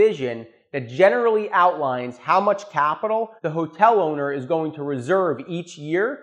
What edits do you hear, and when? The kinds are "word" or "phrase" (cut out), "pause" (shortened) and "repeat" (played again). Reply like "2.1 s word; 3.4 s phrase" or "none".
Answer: 3.4 s pause